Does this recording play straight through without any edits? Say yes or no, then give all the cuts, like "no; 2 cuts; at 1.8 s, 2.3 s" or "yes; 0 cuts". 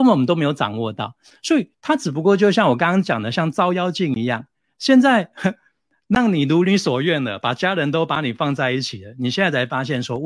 no; 1 cut; at 1.7 s